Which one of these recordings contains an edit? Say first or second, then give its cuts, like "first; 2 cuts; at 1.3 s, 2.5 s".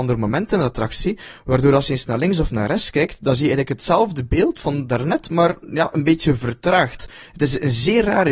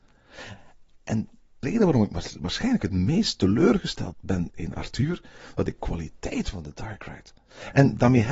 second; 4 cuts; at 1.6 s, 4.1 s, 4.5 s, 5.7 s